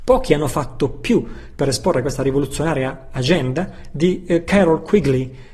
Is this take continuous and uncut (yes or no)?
yes